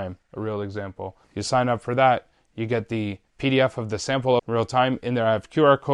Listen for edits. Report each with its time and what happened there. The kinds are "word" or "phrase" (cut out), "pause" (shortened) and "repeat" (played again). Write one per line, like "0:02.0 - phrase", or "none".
0:01.2 - pause
0:03.3 - pause
0:04.4 - phrase